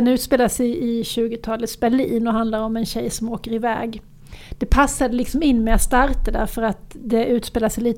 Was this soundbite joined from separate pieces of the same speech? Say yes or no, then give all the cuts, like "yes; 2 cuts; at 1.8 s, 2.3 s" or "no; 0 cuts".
no; 0 cuts